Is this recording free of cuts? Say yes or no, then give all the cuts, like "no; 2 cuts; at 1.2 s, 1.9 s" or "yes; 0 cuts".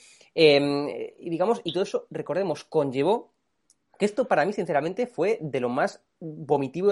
yes; 0 cuts